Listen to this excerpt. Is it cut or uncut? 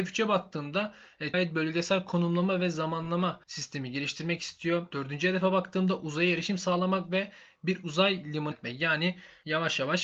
cut